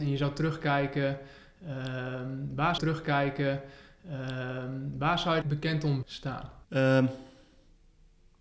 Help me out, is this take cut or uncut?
cut